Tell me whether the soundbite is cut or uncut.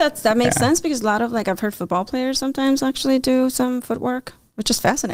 uncut